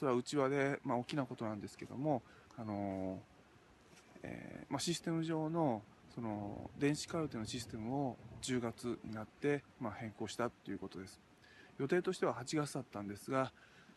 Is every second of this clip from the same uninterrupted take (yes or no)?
no